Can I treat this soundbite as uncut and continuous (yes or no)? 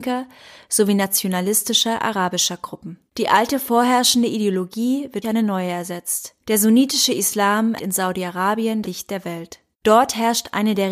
no